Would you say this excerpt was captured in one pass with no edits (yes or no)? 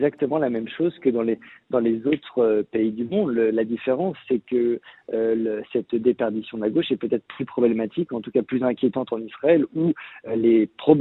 yes